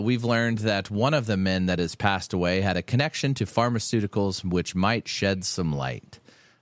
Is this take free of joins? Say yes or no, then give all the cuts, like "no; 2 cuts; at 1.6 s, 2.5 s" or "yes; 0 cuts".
yes; 0 cuts